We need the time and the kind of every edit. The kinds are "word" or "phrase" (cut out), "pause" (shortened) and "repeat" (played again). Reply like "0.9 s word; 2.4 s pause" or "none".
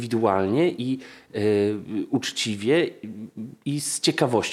none